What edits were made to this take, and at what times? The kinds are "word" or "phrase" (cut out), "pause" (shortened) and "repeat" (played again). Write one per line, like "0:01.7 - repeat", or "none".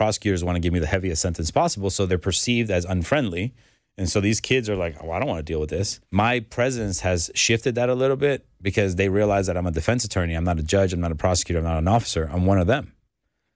0:06.0 - pause